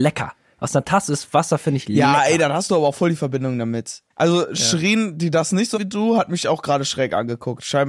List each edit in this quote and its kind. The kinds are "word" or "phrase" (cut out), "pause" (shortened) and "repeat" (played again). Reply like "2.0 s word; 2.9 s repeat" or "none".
4.1 s pause; 5.7 s word